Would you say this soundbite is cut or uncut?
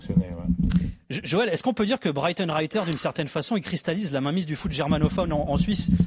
uncut